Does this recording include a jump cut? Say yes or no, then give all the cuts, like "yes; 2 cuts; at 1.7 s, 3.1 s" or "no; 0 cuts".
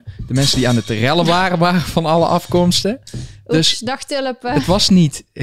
no; 0 cuts